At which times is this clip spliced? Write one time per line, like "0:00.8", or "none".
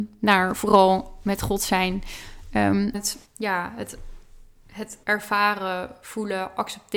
0:02.9
0:03.2
0:05.0

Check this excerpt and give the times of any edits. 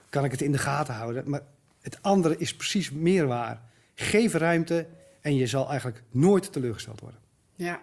none

